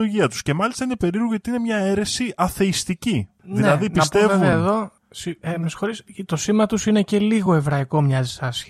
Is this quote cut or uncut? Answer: uncut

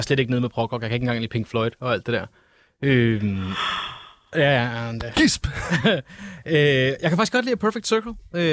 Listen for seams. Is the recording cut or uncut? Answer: uncut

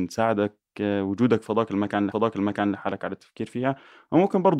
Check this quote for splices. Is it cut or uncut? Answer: cut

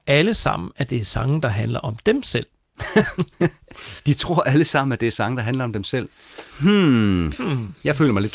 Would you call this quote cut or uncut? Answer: cut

